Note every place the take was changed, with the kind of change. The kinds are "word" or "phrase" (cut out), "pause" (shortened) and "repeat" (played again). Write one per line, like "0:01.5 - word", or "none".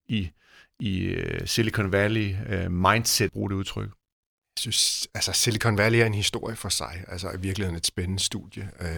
0:03.3 - phrase